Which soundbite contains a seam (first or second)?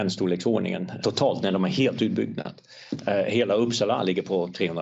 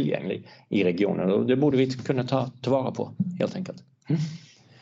first